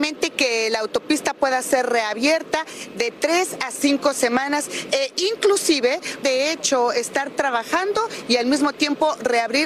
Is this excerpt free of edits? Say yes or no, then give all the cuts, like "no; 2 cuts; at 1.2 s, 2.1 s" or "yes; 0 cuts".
no; 1 cut; at 6.2 s